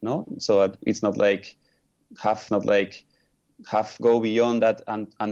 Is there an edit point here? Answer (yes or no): yes